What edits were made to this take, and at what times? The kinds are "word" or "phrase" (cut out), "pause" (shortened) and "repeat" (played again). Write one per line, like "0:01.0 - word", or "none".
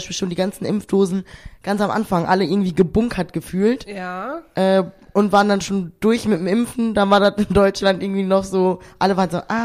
none